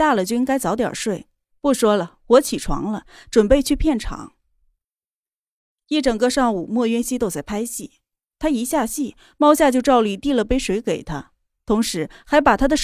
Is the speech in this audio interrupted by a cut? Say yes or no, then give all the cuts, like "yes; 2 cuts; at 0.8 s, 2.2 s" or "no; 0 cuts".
no; 0 cuts